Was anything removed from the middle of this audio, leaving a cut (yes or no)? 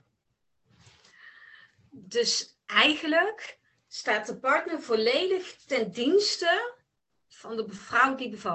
no